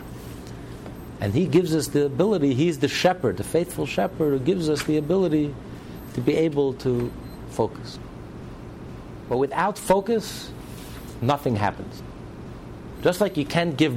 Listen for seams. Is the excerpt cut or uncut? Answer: uncut